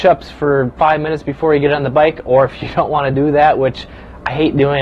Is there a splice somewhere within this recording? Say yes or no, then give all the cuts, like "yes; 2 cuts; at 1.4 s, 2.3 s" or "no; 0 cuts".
no; 0 cuts